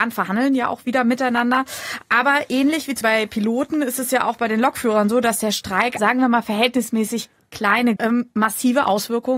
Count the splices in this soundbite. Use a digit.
3